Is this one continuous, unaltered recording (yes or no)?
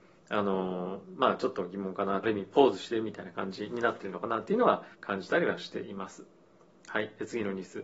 no